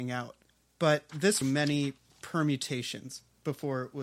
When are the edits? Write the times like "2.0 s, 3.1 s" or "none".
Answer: 1.1 s, 1.4 s